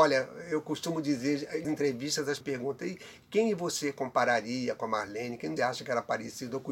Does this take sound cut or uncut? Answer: cut